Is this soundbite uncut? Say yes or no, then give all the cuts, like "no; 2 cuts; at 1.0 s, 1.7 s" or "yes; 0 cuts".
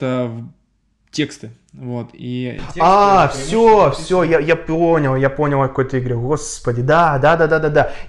yes; 0 cuts